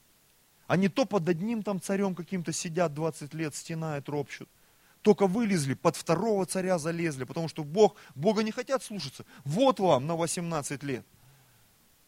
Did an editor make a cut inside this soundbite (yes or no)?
no